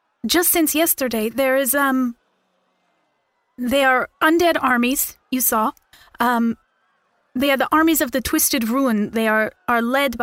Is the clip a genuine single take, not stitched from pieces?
yes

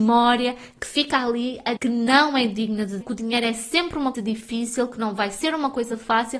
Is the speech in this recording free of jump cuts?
no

